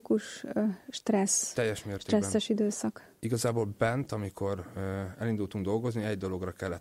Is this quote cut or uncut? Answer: uncut